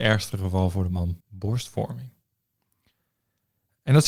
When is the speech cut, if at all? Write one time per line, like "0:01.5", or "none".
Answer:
0:01.2